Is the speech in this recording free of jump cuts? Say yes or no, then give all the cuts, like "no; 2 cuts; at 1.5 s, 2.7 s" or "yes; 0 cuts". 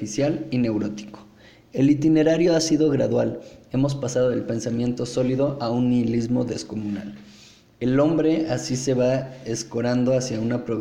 yes; 0 cuts